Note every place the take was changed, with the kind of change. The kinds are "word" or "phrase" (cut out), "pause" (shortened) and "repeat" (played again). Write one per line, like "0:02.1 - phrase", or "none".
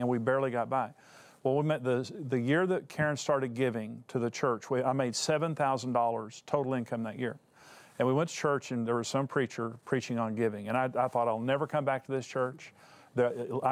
none